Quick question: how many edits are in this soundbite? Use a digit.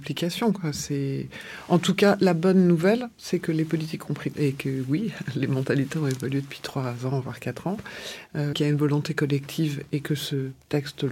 2